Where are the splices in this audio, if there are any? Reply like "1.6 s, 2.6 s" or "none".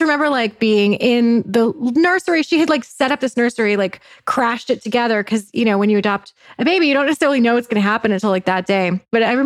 none